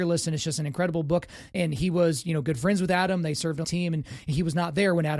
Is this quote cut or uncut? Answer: cut